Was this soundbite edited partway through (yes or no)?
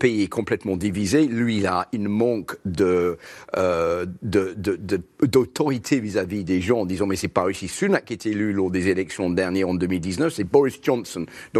no